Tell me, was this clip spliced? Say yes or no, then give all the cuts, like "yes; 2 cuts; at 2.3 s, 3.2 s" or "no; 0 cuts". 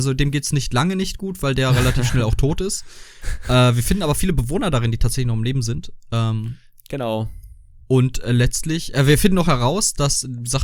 no; 0 cuts